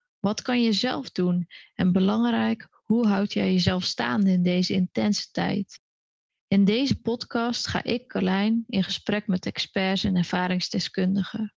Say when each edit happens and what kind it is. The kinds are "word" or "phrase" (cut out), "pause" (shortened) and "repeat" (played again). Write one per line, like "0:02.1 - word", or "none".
none